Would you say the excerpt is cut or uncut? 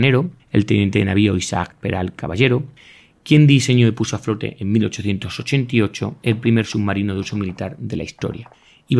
uncut